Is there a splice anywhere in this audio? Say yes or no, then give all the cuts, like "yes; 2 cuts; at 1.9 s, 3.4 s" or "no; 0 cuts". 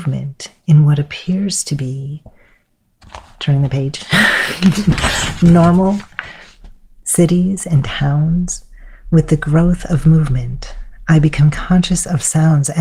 no; 0 cuts